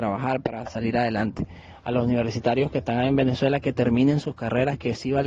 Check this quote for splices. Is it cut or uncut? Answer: uncut